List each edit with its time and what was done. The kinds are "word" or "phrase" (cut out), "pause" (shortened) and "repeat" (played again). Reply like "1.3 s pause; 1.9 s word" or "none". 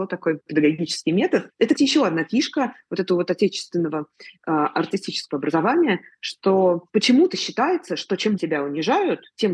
1.7 s word; 4.4 s pause; 6.9 s pause; 8.4 s word